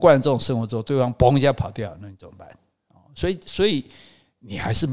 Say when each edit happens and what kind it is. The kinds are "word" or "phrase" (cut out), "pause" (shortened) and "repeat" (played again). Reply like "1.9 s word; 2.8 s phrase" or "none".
none